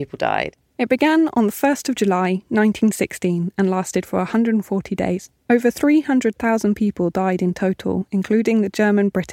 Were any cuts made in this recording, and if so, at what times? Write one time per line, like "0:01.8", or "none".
none